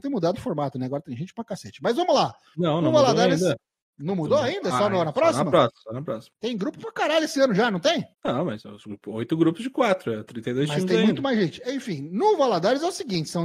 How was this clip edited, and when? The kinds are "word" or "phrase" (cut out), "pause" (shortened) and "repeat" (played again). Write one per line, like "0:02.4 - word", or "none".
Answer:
0:08.1 - pause

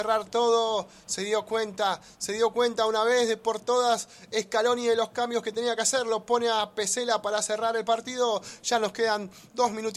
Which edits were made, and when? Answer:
none

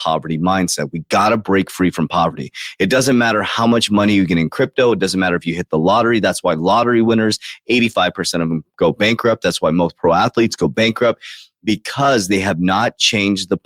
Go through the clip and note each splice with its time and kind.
none

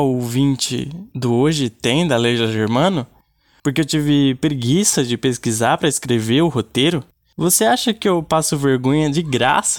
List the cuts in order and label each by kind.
none

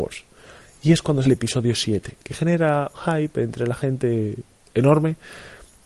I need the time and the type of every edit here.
0:01.2 - word
0:02.9 - word

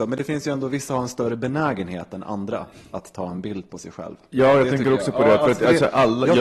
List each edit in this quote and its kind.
none

